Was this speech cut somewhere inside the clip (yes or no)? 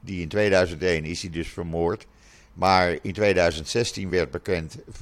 no